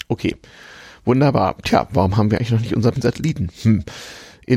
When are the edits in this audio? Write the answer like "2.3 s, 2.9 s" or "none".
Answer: 2.9 s